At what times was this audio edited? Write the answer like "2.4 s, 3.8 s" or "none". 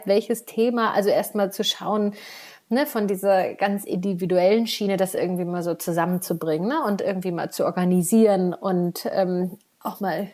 none